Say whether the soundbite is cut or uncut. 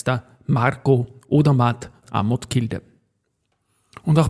cut